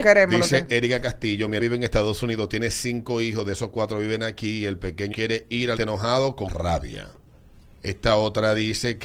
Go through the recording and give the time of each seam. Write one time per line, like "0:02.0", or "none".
0:01.6
0:05.1
0:05.8
0:06.5